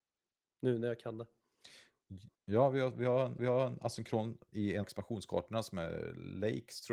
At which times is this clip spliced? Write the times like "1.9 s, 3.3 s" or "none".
2.3 s, 3.4 s, 4.8 s